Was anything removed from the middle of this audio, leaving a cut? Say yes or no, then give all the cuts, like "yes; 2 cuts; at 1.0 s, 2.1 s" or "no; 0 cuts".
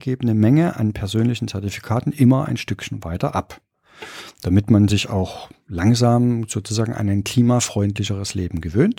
no; 0 cuts